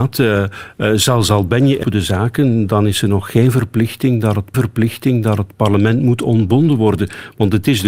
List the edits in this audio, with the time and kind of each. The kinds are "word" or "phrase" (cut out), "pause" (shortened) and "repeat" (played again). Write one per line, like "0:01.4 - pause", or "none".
0:01.8 - word
0:04.5 - repeat

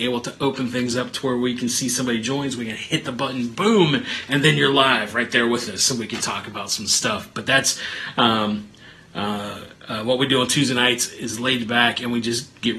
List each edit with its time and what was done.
none

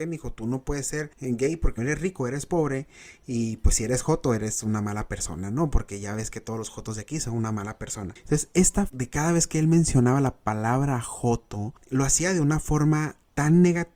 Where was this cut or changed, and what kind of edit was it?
0:01.8 - word
0:08.9 - phrase

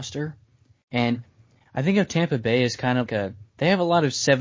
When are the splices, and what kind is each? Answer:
0:03.1 - word

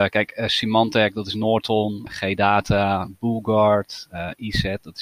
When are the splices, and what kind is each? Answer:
0:02.1 - word

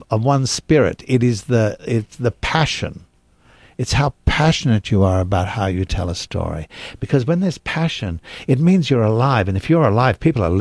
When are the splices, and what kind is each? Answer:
none

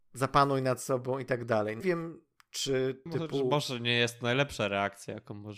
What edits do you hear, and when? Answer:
0:01.8 - word
0:03.1 - word

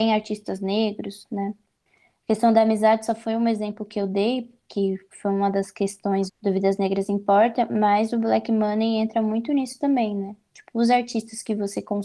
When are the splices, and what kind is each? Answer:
0:06.3 - word

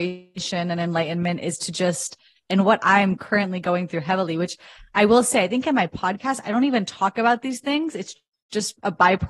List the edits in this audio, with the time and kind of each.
none

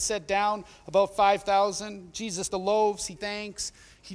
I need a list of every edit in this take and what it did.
0:02.5 - word
0:03.2 - word

